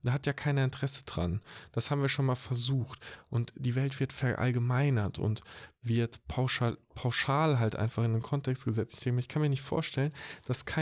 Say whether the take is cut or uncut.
uncut